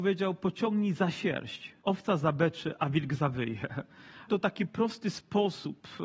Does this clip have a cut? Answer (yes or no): yes